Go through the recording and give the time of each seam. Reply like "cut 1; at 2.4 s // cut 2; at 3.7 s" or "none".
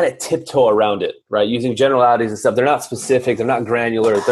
none

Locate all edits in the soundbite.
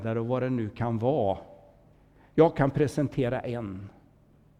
none

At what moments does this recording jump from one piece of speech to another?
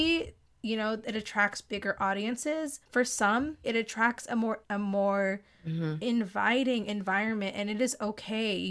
cut 1; at 2.8 s // cut 2; at 3.6 s // cut 3; at 4.6 s

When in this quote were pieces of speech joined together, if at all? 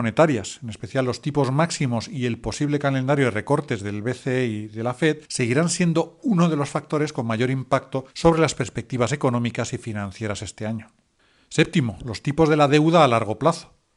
cut 1; at 5.3 s // cut 2; at 8.1 s // cut 3; at 11.2 s

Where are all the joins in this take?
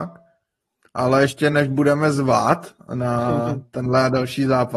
none

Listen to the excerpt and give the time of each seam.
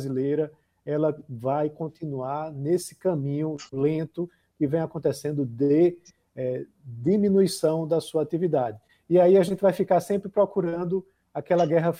none

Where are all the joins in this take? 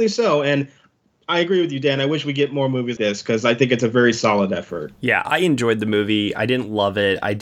cut 1; at 3.0 s // cut 2; at 5.0 s

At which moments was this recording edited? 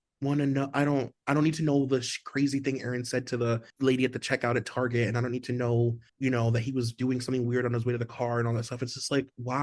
cut 1; at 3.7 s // cut 2; at 6.1 s

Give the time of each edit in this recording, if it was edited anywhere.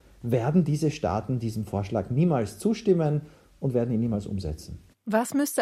none

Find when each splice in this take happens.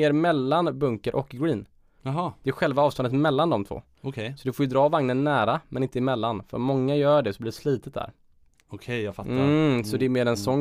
none

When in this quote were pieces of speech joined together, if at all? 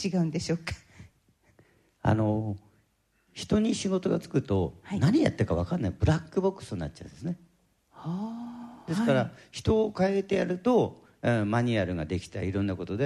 none

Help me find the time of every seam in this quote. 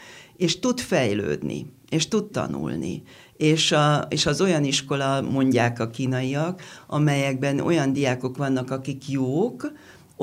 cut 1; at 2.3 s

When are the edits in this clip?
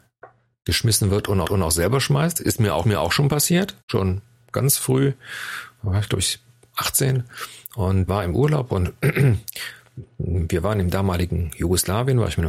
cut 1; at 1.4 s // cut 2; at 2.8 s // cut 3; at 3.8 s // cut 4; at 8.1 s

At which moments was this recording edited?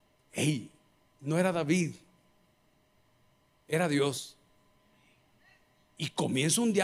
none

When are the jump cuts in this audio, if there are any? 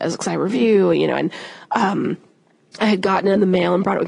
none

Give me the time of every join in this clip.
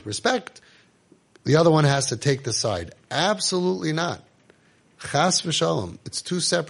none

